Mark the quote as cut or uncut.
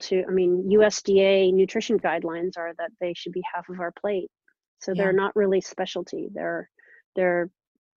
uncut